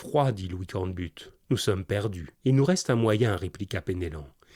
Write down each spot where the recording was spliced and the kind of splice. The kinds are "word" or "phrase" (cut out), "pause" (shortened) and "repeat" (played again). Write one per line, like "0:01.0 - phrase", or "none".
0:01.4 - pause
0:02.3 - pause